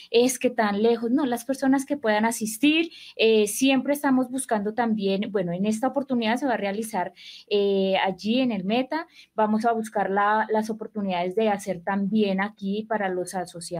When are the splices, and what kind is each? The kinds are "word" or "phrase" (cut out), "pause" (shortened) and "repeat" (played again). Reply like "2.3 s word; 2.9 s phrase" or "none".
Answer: none